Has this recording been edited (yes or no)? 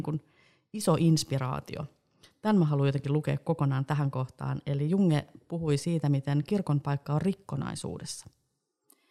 no